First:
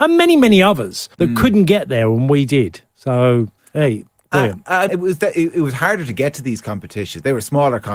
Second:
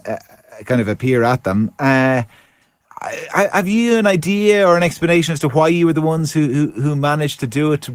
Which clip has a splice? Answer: first; 3 cuts; at 1.1 s, 3.6 s, 4.9 s

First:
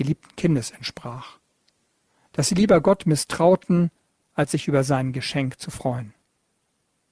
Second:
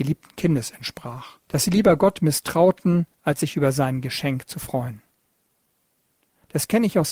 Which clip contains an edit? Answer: second; 2 cuts; at 1.4 s, 3.1 s

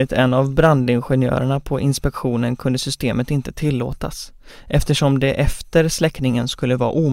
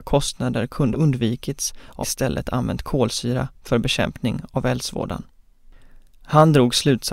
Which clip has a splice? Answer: second; 2 cuts; at 0.9 s, 2.0 s

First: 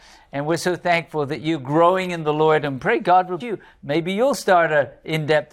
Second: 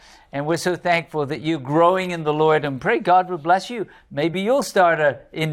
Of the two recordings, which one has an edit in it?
first; 1 cut; at 3.4 s

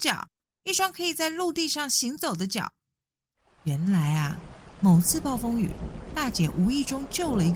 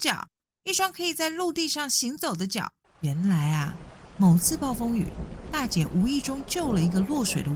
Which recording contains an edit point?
second; 1 cut; at 2.8 s

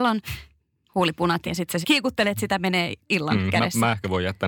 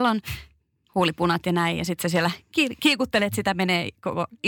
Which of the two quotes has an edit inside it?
first; 3 cuts; at 1.4 s, 1.8 s, 3.0 s

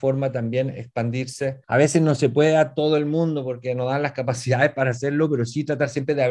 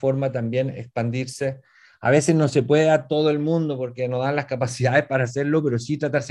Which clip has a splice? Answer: first; 1 cut; at 1.6 s

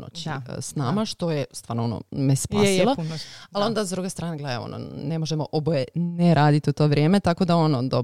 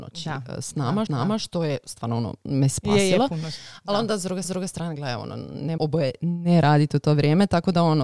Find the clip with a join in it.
second; 3 cuts; at 1.1 s, 4.4 s, 5.8 s

